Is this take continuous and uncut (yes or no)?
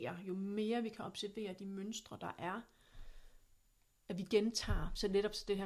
yes